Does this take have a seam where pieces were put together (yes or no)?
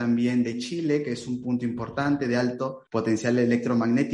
yes